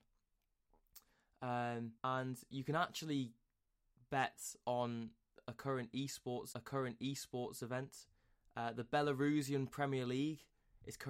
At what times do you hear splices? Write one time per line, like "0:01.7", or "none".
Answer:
0:02.0
0:06.5